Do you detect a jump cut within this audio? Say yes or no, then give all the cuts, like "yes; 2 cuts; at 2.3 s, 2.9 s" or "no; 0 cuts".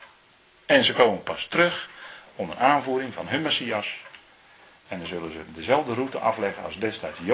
no; 0 cuts